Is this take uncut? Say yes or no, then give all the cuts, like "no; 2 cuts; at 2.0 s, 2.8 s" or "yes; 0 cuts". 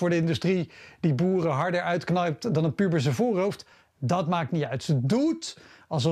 yes; 0 cuts